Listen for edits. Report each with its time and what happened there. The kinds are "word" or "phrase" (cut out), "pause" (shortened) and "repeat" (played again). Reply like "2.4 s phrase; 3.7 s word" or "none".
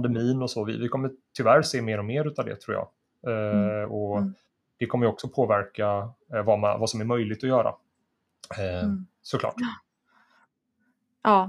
none